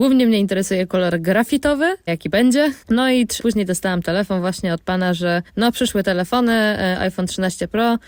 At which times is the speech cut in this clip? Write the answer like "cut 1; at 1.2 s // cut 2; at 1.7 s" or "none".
cut 1; at 2.1 s // cut 2; at 2.8 s // cut 3; at 3.4 s // cut 4; at 5.5 s